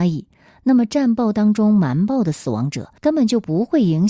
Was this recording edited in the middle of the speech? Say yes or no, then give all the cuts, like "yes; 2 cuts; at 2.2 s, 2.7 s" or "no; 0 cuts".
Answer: yes; 1 cut; at 3.0 s